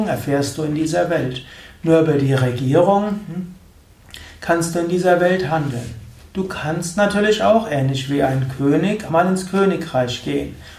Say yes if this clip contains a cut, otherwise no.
yes